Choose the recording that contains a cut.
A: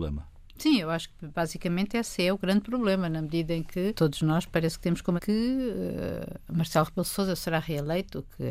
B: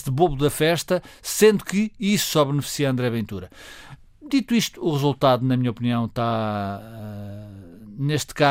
A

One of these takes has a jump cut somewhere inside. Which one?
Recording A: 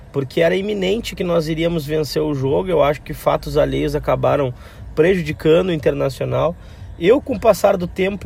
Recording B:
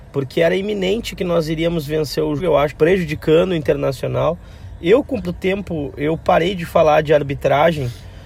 B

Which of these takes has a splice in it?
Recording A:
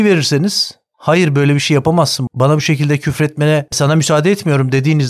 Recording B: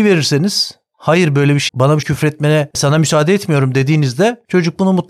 B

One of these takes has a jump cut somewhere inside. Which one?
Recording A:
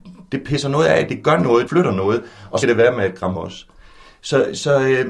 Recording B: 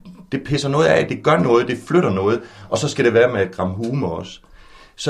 A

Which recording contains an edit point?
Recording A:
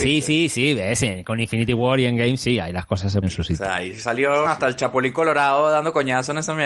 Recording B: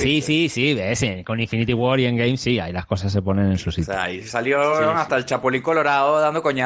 A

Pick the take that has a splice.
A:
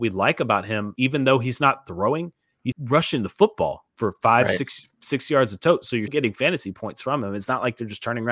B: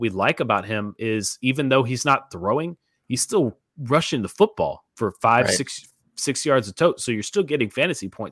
A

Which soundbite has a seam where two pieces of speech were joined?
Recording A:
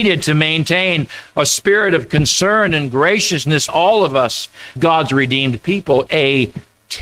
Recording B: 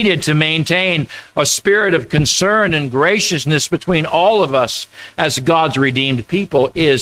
A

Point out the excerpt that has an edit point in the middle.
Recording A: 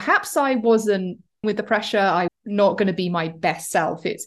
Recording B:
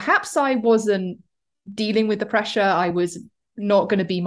A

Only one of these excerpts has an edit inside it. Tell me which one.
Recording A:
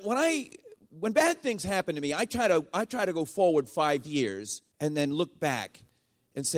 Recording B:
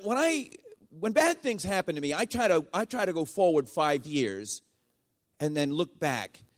A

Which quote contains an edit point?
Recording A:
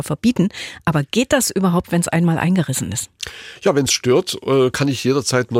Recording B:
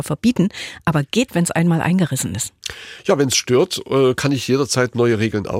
B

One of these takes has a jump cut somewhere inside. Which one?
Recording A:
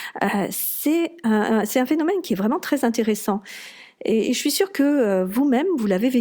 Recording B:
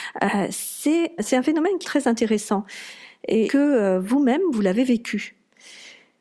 B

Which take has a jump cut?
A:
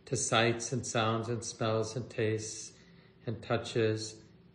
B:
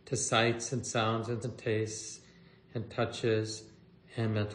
B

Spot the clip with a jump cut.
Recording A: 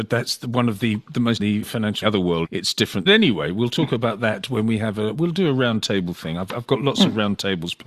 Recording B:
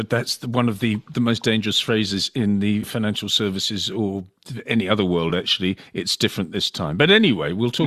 A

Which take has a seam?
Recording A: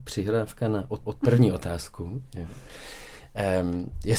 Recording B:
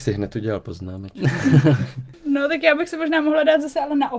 A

